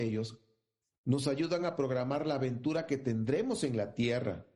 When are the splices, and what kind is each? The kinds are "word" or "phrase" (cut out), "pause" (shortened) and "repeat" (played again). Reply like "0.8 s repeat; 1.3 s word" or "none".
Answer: none